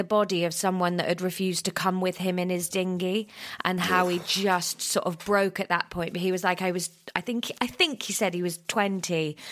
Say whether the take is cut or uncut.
uncut